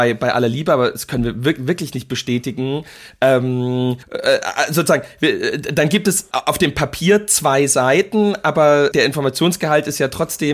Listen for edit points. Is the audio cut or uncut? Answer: cut